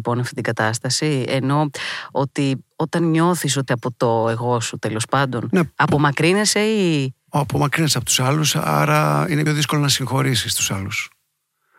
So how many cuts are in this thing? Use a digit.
3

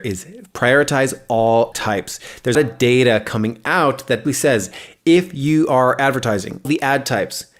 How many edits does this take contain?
4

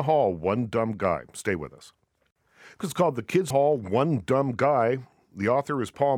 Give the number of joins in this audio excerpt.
2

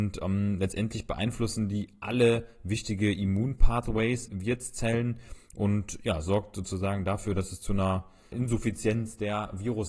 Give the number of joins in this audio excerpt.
2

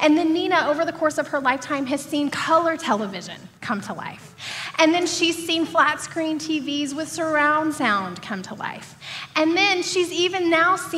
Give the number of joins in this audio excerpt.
1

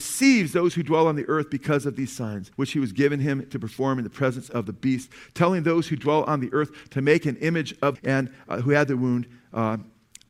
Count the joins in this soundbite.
2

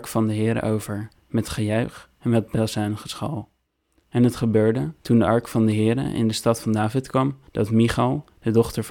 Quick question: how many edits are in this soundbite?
3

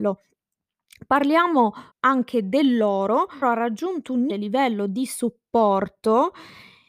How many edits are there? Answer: 3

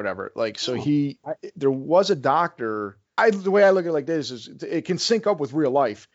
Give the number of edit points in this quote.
2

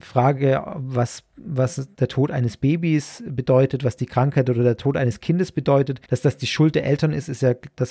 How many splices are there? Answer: 1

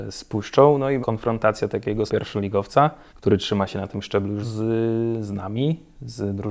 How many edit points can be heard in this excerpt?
4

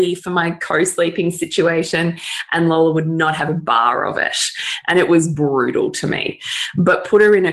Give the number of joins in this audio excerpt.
0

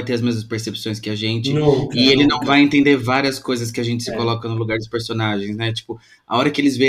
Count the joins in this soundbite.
0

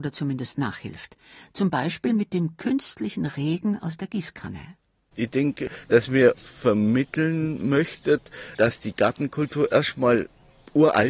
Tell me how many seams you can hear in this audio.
1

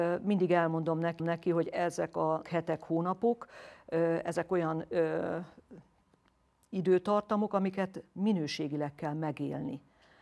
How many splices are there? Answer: 2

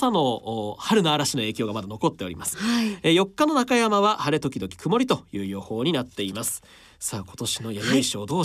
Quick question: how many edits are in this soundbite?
0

